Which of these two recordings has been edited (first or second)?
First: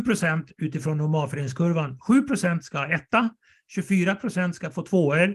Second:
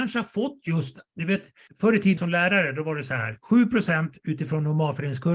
second